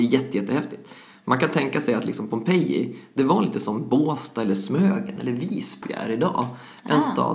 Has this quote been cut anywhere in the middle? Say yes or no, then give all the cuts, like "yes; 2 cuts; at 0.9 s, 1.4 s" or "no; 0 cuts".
no; 0 cuts